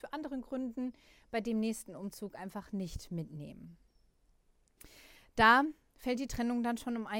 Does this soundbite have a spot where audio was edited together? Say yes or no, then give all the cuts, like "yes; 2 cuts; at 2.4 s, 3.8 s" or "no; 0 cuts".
no; 0 cuts